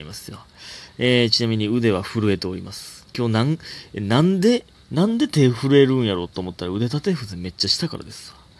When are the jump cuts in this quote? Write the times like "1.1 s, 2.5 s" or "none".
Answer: 3.1 s, 4.7 s